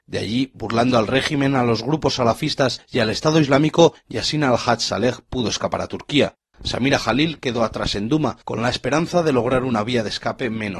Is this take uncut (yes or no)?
yes